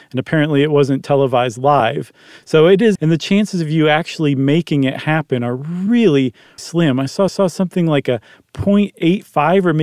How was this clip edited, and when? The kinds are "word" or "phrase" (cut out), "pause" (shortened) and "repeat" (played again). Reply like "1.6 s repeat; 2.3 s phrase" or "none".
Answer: 3.0 s phrase; 6.6 s word; 7.3 s repeat

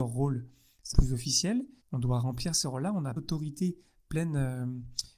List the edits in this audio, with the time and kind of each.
0.9 s word; 1.8 s pause; 3.2 s word

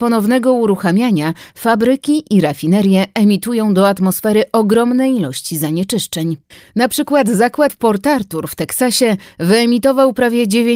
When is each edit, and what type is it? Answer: 6.5 s pause; 7.7 s word

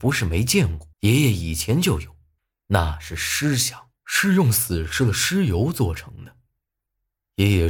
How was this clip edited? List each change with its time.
0.9 s pause; 2.4 s pause; 4.0 s pause

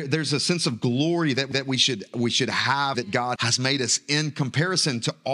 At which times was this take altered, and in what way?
1.5 s repeat; 2.9 s phrase; 3.4 s word

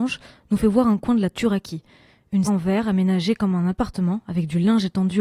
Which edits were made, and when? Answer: 2.5 s word

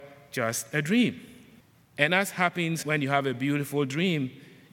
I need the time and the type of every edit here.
1.6 s pause; 2.8 s word

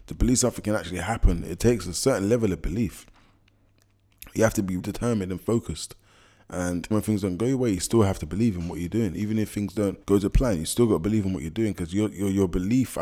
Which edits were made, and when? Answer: 4.8 s word; 6.9 s word; 10.0 s pause

